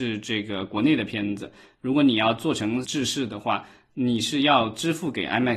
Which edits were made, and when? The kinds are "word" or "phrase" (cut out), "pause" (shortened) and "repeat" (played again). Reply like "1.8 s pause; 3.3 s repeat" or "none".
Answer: 2.8 s word